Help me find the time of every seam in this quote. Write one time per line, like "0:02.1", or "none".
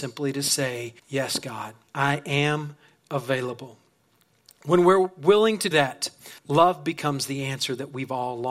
0:01.0
0:01.9
0:05.7
0:06.4